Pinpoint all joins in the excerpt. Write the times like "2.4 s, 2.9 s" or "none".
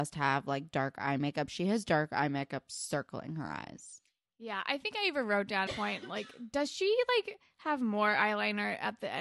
5.7 s